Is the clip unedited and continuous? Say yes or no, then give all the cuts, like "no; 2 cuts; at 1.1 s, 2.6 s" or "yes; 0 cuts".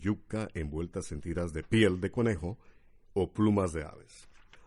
yes; 0 cuts